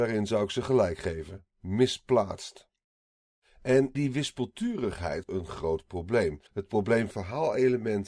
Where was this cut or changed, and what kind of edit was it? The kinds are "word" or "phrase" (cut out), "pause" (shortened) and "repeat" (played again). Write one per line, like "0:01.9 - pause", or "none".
0:01.5 - pause
0:03.9 - word
0:05.2 - word
0:06.5 - pause
0:07.1 - phrase